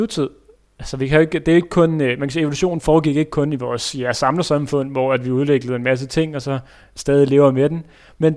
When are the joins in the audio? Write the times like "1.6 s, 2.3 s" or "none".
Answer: none